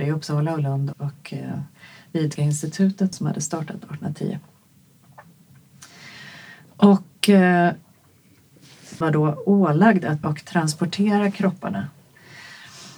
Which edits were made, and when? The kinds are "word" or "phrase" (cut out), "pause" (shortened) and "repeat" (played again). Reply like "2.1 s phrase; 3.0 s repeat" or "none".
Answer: 0.9 s word; 2.4 s word; 3.1 s word; 9.0 s word; 10.2 s word